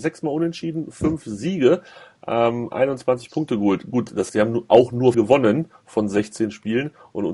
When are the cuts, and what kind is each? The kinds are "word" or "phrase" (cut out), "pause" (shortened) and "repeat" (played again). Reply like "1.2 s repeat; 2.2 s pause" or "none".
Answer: 4.3 s word; 5.1 s word